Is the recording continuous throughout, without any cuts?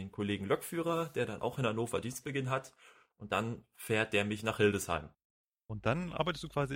yes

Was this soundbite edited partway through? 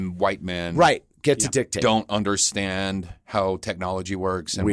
no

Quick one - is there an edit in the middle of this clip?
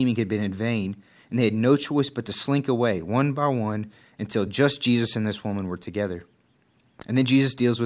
no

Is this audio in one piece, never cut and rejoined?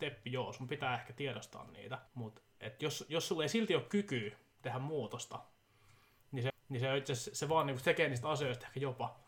no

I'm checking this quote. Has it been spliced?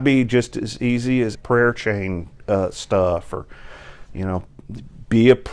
yes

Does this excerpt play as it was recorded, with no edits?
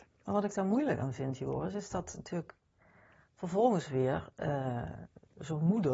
yes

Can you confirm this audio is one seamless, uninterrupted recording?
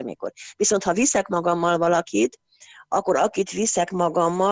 yes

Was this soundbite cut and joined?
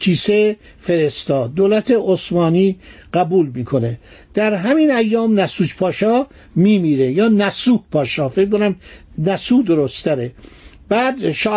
no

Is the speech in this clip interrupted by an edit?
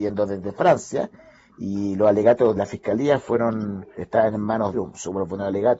yes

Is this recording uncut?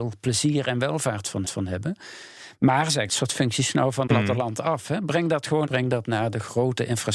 no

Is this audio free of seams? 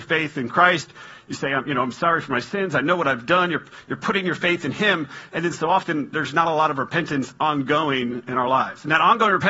yes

